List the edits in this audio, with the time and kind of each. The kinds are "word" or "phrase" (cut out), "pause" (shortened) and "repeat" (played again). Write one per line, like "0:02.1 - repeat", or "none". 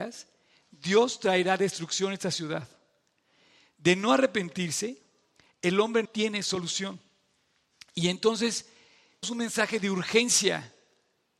0:06.0 - word
0:09.2 - word